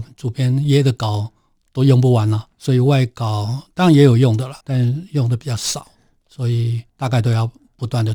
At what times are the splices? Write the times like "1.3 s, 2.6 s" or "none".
2.5 s, 4.6 s, 6.9 s